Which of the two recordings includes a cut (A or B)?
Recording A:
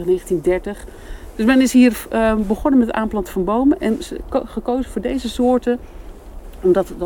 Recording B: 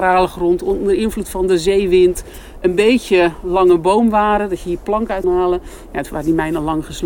B